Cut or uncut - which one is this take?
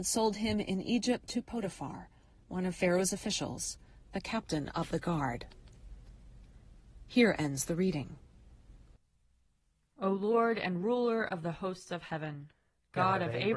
uncut